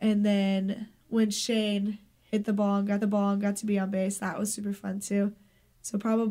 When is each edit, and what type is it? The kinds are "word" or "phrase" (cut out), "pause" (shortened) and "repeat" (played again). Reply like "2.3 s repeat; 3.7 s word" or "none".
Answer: 3.0 s repeat